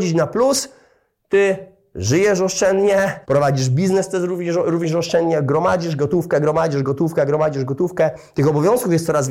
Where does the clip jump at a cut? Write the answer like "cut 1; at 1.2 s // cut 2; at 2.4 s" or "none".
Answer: cut 1; at 3.2 s